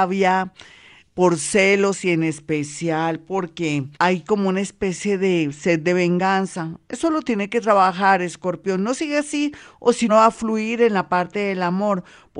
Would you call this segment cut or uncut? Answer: cut